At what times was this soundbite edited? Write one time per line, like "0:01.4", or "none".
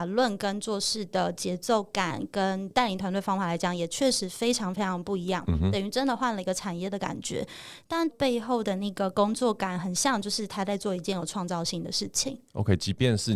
0:08.1